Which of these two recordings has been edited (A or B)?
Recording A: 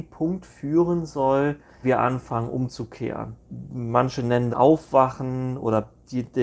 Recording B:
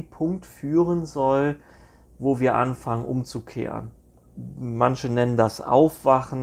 A